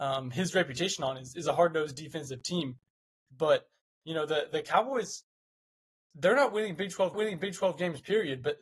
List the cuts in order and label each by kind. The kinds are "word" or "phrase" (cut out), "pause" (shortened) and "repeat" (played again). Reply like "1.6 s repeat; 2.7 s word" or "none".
7.1 s repeat